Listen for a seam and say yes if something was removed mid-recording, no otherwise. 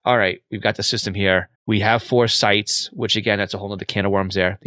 yes